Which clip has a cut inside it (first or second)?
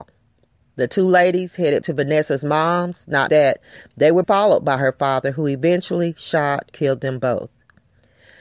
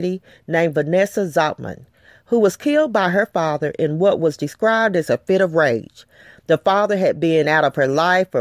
first